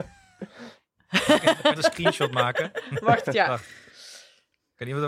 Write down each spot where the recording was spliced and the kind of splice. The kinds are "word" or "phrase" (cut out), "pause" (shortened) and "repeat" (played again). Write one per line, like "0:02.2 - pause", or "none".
0:01.8 - word
0:03.3 - word